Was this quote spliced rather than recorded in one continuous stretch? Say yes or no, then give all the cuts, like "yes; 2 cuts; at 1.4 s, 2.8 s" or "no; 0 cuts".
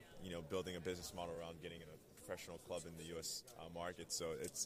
no; 0 cuts